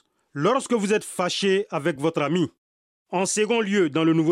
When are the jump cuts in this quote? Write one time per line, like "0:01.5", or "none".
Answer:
none